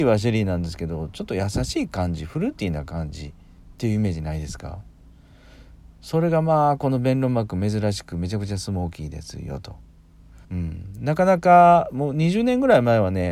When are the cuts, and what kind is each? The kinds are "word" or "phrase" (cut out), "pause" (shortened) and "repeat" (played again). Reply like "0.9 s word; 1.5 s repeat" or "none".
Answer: 10.4 s pause